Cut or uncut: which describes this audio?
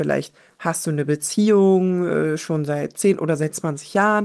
uncut